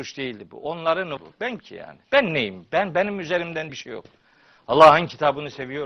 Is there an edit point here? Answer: yes; 4 cuts; at 1.2 s, 1.6 s, 2.0 s, 3.7 s

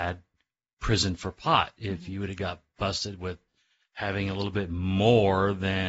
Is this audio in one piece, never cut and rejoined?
yes; 0 cuts

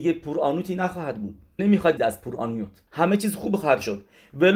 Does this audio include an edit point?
yes; 3 cuts; at 1.6 s, 2.0 s, 2.9 s

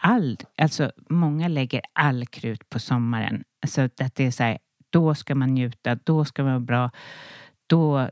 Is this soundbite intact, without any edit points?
yes; 0 cuts

